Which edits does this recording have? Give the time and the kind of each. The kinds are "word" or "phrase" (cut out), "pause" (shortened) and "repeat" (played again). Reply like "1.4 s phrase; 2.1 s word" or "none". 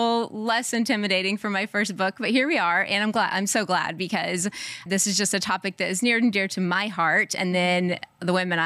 4.9 s word